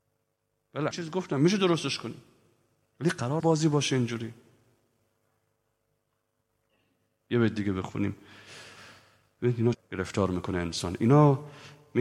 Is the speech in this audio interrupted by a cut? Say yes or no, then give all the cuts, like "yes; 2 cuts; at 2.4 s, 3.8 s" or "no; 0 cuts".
yes; 3 cuts; at 0.9 s, 3.4 s, 9.7 s